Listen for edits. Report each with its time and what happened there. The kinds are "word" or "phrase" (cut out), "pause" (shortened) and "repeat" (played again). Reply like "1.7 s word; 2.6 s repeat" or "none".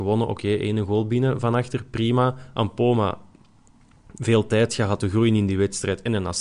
5.0 s word